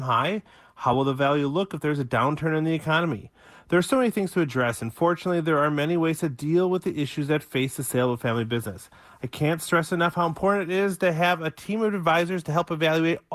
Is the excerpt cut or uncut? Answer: uncut